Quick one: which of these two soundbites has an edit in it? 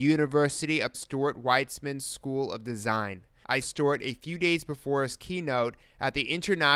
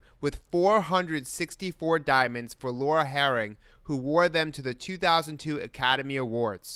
first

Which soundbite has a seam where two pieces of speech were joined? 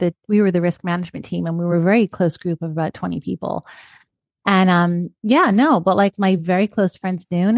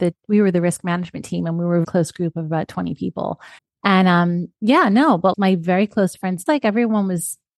second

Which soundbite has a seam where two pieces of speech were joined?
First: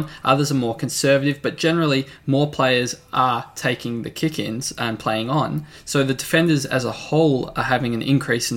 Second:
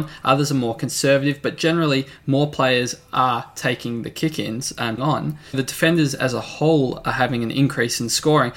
second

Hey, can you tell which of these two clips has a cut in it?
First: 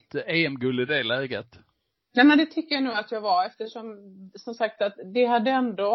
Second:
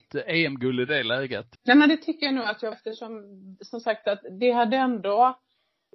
second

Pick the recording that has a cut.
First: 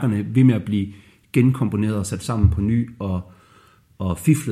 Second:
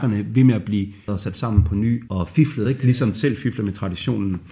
second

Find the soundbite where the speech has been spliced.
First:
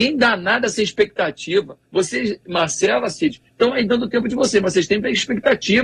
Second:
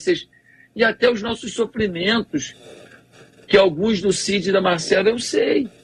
first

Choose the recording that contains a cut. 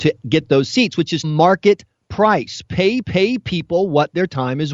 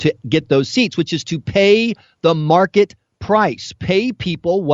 first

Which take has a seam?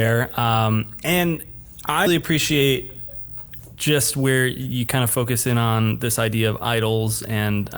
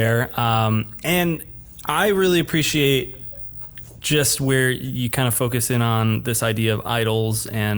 first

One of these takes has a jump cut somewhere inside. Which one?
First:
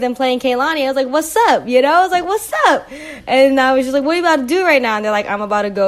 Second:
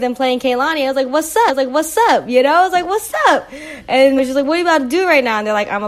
second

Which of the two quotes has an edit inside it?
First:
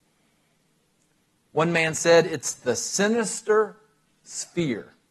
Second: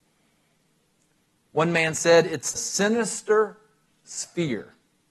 second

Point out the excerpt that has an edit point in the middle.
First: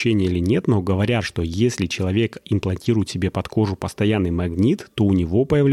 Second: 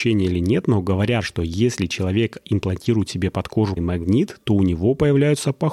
second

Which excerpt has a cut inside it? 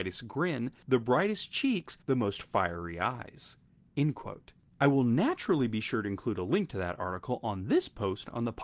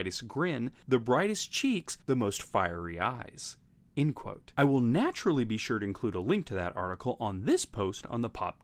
second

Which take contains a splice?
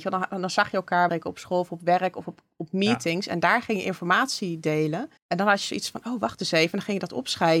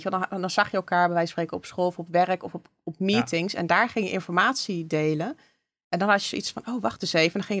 first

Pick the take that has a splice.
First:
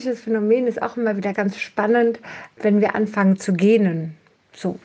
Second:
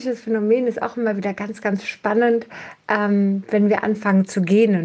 first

